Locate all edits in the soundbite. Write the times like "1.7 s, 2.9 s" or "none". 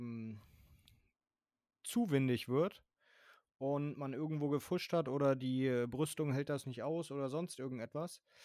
none

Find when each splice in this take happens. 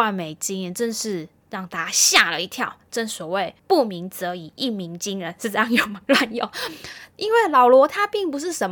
3.6 s

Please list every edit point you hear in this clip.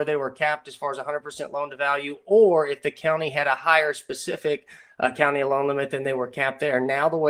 none

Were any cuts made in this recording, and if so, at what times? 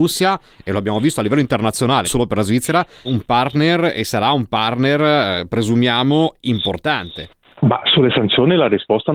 2.0 s, 3.0 s

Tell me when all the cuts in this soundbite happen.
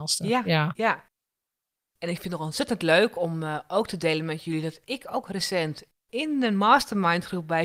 none

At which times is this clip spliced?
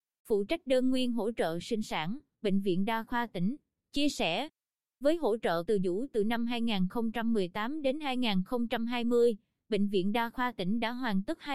5.7 s

